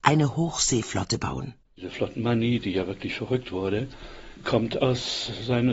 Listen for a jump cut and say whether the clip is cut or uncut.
uncut